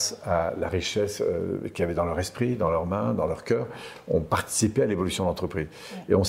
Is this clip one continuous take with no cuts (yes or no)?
yes